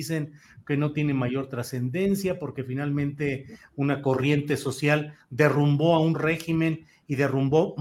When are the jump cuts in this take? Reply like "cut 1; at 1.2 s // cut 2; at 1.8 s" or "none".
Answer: none